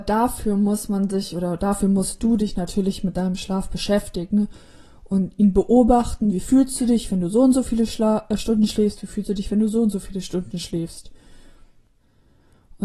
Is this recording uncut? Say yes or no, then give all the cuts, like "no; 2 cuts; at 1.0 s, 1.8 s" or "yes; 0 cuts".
yes; 0 cuts